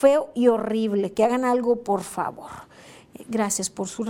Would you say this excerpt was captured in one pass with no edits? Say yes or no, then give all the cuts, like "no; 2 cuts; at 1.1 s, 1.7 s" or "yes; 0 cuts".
yes; 0 cuts